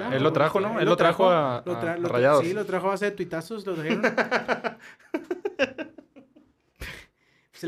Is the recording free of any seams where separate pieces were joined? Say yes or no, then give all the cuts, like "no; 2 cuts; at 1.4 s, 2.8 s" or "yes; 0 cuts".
yes; 0 cuts